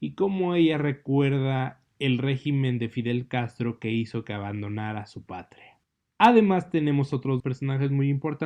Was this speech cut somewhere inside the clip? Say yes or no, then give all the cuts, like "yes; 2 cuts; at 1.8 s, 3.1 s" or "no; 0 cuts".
yes; 1 cut; at 7.4 s